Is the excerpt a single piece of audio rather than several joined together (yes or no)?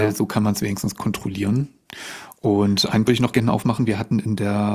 no